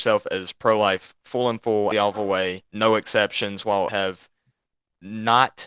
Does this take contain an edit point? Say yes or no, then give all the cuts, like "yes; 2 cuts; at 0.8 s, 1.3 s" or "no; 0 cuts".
yes; 3 cuts; at 1.9 s, 2.7 s, 3.9 s